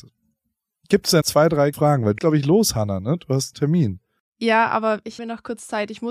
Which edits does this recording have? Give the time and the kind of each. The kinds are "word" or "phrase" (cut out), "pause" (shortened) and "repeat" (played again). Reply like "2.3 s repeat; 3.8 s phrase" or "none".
1.2 s word; 1.7 s word; 2.2 s word; 3.5 s word; 5.2 s word